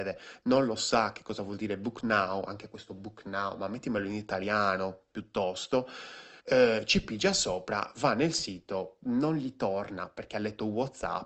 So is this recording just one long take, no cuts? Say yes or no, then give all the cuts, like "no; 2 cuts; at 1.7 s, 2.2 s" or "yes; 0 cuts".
no; 1 cut; at 6.4 s